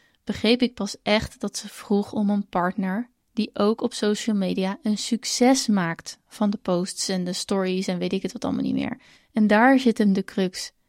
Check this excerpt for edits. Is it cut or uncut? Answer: cut